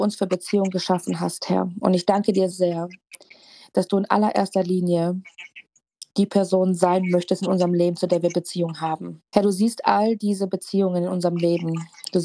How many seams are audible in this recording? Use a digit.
2